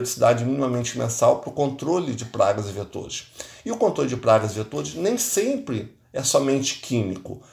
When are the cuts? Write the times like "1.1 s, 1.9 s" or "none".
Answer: none